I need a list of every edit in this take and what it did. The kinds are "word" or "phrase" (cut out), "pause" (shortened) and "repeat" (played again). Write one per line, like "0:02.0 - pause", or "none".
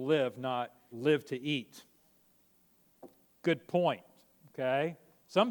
0:00.9 - word